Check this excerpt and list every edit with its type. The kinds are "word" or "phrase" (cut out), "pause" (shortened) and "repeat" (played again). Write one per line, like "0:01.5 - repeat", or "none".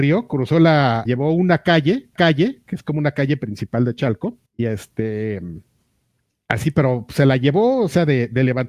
0:01.1 - phrase
0:02.2 - repeat
0:04.5 - pause